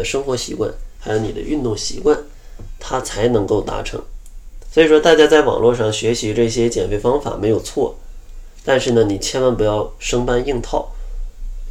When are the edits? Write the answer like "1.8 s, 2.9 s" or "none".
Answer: 1.0 s